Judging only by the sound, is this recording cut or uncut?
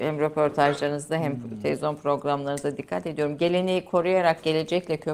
uncut